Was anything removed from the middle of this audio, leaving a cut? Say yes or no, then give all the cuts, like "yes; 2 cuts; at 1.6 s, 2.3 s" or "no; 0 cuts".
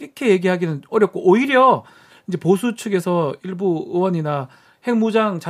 no; 0 cuts